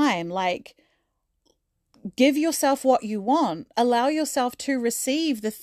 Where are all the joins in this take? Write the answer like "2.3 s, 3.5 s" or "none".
none